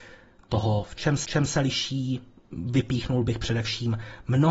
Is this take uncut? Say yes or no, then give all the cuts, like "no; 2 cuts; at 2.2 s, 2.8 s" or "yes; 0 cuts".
no; 1 cut; at 1.2 s